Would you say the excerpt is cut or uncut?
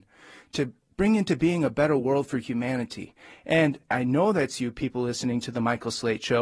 uncut